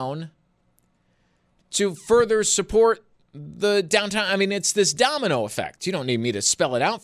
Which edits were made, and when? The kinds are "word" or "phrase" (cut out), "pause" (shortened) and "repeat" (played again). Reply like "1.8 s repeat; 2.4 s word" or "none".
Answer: none